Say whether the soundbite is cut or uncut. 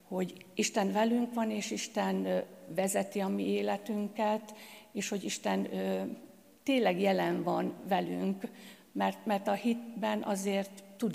uncut